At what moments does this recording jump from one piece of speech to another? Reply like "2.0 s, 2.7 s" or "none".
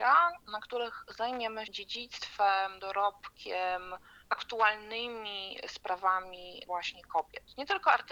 1.6 s, 6.6 s